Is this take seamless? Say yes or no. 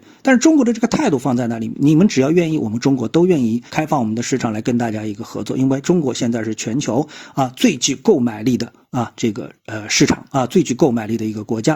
no